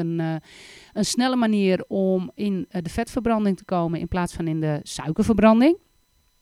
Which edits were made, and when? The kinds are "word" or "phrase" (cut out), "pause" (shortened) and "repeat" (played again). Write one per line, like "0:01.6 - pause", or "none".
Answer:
none